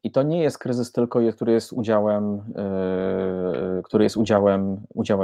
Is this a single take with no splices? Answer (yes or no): yes